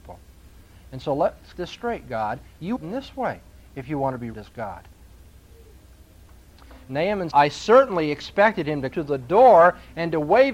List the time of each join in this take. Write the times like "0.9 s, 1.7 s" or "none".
1.5 s, 2.8 s, 4.3 s, 7.3 s, 8.9 s